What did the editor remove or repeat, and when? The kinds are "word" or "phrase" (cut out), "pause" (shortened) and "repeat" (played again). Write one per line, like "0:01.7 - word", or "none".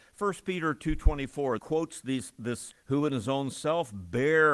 0:01.6 - word
0:02.7 - word